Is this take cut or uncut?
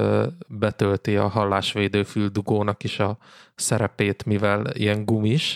uncut